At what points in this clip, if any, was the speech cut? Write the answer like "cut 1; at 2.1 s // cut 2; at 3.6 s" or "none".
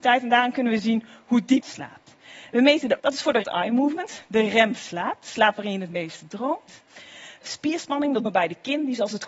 cut 1; at 1.6 s // cut 2; at 3.0 s // cut 3; at 3.4 s // cut 4; at 7.4 s // cut 5; at 8.3 s